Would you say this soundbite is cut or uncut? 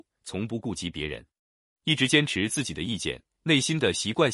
uncut